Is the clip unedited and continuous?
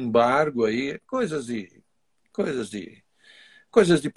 yes; 0 cuts

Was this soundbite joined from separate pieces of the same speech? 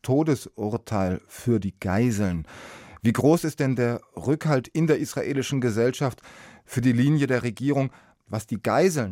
no; 0 cuts

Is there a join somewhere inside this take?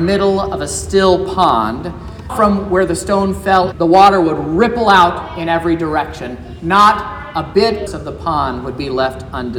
yes; 3 cuts; at 2.3 s, 3.7 s, 7.9 s

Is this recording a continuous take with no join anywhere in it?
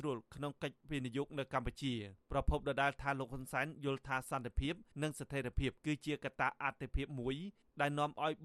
no; 3 cuts; at 2.2 s, 4.9 s, 5.8 s

